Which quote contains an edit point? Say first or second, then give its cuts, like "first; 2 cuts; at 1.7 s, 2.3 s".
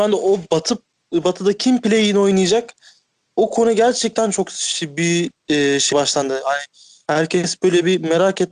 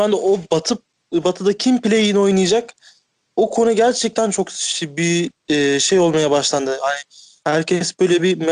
first; 1 cut; at 5.9 s